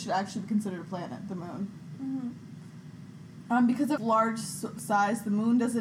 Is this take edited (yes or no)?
yes